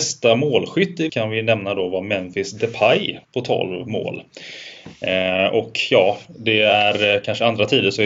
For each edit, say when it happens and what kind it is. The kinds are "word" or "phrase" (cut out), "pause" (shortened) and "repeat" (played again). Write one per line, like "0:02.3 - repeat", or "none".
0:01.1 - word
0:03.2 - pause
0:06.2 - phrase